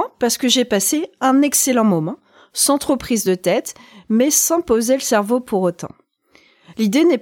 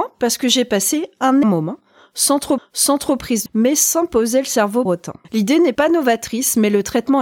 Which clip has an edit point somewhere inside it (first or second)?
second